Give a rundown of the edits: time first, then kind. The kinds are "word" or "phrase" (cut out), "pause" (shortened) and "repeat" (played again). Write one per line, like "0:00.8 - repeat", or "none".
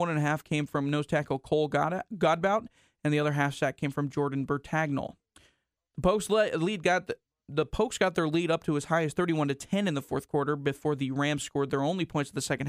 none

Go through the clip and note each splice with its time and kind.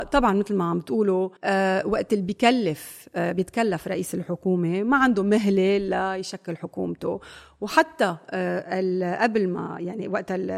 0:01.4 - pause

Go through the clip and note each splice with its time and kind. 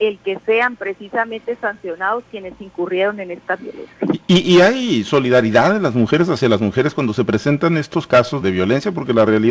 0:08.4 - word

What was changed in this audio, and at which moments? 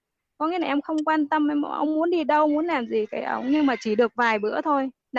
none

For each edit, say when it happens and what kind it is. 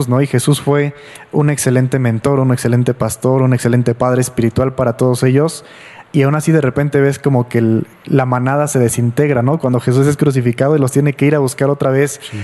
0:07.9 - pause

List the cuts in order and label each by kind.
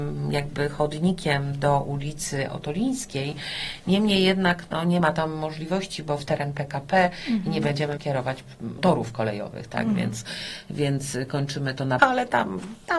0:06.2 - word
0:08.0 - word
0:08.8 - word
0:12.0 - word

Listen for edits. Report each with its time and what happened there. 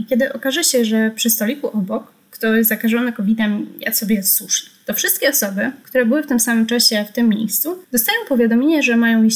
0:07.8 - pause

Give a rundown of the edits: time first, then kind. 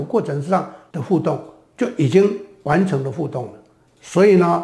none

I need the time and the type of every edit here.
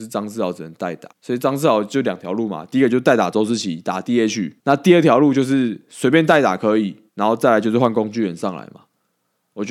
0:01.1 - pause
0:04.6 - pause
0:07.1 - pause

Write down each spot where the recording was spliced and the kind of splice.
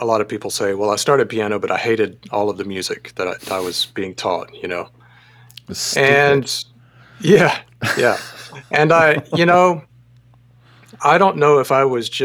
none

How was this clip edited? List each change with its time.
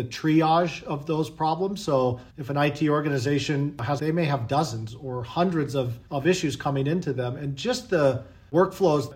0:02.3 - pause
0:04.0 - phrase
0:06.1 - pause

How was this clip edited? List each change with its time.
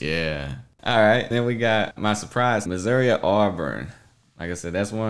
0:01.3 - word
0:02.0 - word
0:02.7 - word

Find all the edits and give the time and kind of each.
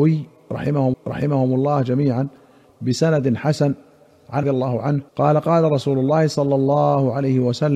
0:00.9 - repeat
0:04.4 - phrase
0:05.1 - pause

